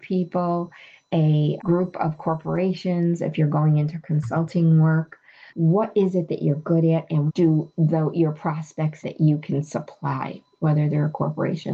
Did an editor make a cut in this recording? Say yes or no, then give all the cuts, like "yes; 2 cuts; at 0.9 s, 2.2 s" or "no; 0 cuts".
yes; 4 cuts; at 1.6 s, 5.5 s, 7.3 s, 9.0 s